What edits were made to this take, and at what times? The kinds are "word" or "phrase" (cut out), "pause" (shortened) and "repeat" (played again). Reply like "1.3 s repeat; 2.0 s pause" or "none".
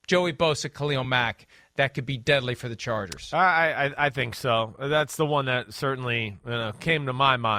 none